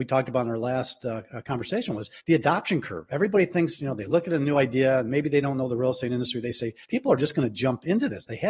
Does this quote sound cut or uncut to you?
cut